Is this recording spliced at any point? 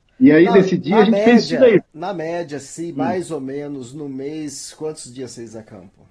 yes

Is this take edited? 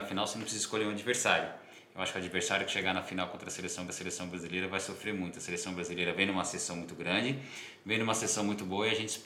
yes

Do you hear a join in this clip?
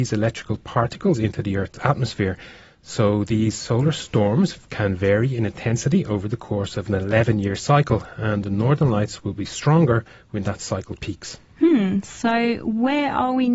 no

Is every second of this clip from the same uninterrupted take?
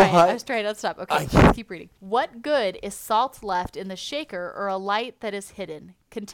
no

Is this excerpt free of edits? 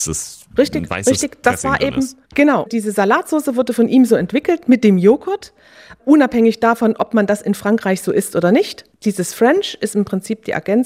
yes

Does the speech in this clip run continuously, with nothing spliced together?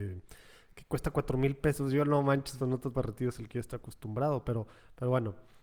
no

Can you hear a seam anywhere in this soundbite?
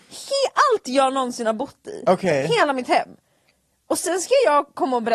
no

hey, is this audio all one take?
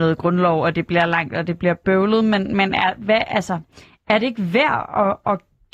yes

